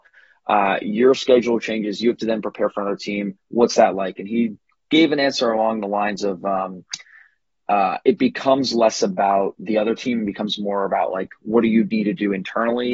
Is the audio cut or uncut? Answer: uncut